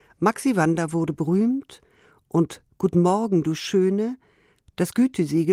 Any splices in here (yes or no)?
no